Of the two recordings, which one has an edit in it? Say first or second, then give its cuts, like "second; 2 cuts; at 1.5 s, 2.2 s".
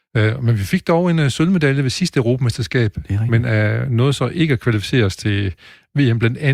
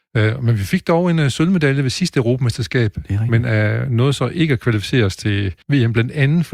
second; 1 cut; at 5.6 s